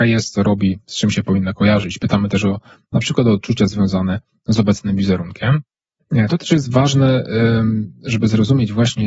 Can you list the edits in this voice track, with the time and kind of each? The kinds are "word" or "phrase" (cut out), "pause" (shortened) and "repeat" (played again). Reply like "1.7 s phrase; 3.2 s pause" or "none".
none